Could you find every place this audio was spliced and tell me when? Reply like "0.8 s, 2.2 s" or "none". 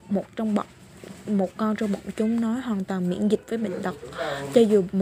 none